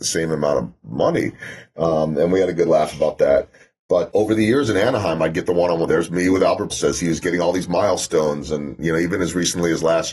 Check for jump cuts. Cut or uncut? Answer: cut